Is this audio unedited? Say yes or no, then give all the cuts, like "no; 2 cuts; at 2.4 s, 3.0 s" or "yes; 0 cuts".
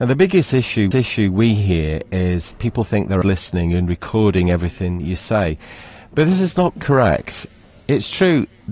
no; 4 cuts; at 0.9 s, 2.5 s, 3.2 s, 6.8 s